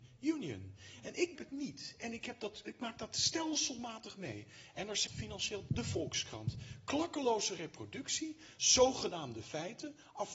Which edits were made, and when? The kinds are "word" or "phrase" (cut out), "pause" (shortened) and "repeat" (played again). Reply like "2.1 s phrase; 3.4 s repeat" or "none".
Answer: 1.3 s word; 5.1 s word; 5.7 s word; 8.6 s word